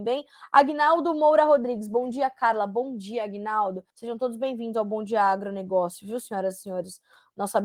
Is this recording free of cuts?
no; 1 cut; at 3.9 s

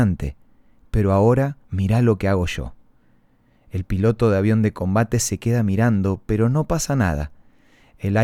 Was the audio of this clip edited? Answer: yes; 1 cut; at 1.6 s

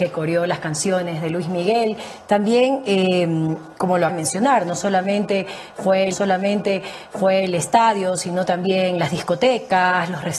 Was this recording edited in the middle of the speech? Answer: yes; 3 cuts; at 3.8 s, 4.1 s, 6.1 s

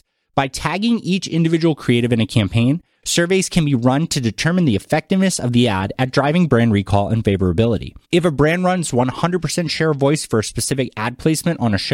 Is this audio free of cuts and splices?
no; 1 cut; at 8.0 s

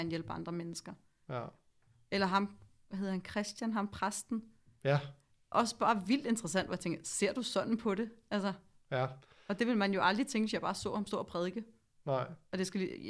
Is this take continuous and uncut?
yes; 0 cuts

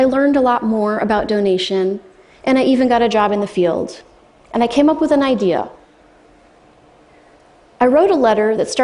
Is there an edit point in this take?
no; 0 cuts

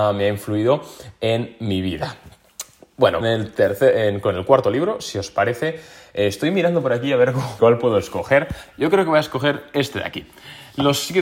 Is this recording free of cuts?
no; 2 cuts; at 3.2 s, 7.6 s

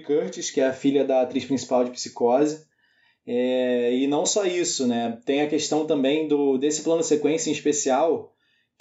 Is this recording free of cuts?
yes; 0 cuts

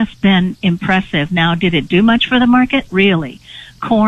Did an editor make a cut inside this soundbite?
yes; 1 cut; at 2.9 s

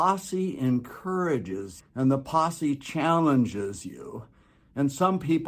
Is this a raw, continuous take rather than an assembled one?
no; 1 cut; at 1.8 s

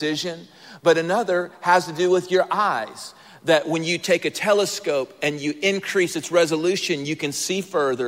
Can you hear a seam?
no; 0 cuts

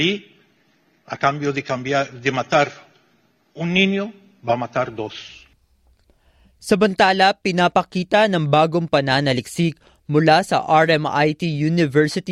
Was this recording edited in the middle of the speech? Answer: no; 0 cuts

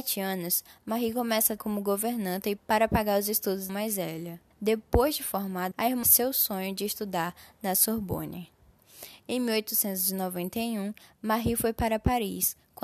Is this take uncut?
no; 6 cuts; at 1.6 s, 2.6 s, 3.7 s, 4.5 s, 5.7 s, 6.0 s

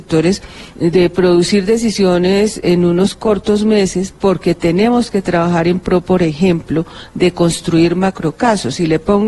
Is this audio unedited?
yes; 0 cuts

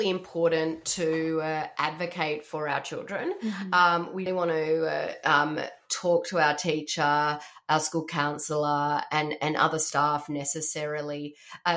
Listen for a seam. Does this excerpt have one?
yes; 1 cut; at 4.3 s

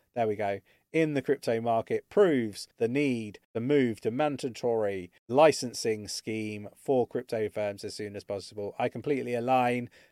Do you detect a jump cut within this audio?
yes; 3 cuts; at 2.7 s, 3.4 s, 5.2 s

